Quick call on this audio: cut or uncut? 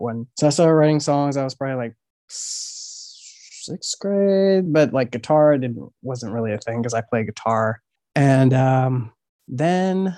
uncut